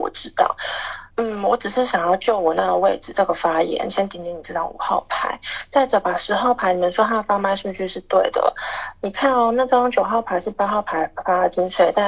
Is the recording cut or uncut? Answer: cut